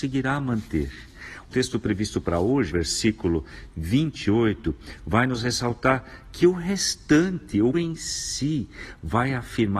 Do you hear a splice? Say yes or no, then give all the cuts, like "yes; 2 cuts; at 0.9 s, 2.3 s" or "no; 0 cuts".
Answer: yes; 3 cuts; at 1.5 s, 2.7 s, 7.7 s